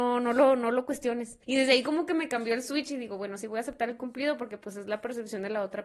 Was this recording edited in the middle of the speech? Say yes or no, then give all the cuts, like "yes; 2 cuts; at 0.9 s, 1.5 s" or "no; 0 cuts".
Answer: yes; 1 cut; at 1.4 s